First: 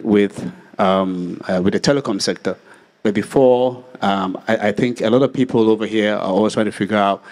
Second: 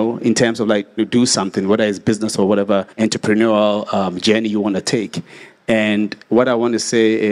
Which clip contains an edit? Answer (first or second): second